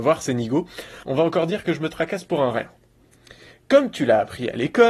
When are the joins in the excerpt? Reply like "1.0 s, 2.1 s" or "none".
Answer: none